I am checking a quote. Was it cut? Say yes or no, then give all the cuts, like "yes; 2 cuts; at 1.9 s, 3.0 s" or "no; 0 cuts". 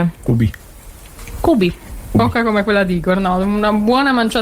no; 0 cuts